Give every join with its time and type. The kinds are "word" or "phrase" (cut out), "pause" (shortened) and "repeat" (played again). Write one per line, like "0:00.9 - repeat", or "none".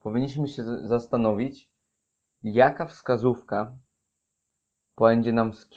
none